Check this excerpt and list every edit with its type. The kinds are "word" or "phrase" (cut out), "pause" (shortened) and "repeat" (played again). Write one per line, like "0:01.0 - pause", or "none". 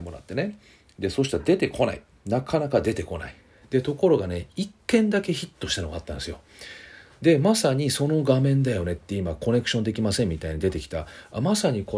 none